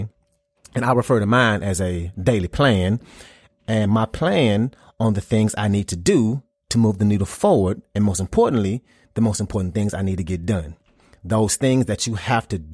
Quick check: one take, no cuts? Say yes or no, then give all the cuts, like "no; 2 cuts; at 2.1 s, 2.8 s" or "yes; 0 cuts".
yes; 0 cuts